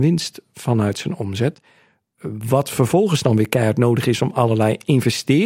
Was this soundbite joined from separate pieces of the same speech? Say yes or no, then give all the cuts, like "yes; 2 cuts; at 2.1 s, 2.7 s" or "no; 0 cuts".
no; 0 cuts